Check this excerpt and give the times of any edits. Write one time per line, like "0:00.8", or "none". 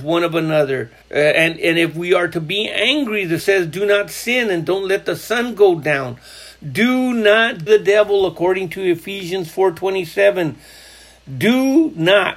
0:01.0
0:03.4
0:07.7

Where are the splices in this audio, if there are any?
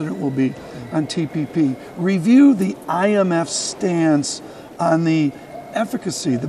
none

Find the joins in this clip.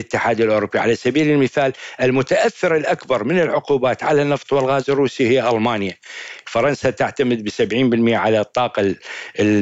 none

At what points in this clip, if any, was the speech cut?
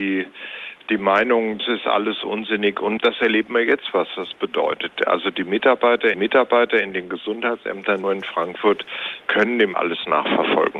0:01.6
0:03.0
0:06.1
0:08.0
0:09.7

